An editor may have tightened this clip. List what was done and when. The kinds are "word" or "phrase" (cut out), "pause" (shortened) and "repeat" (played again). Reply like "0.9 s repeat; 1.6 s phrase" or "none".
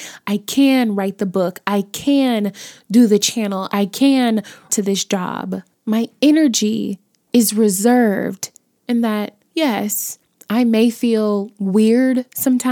4.7 s phrase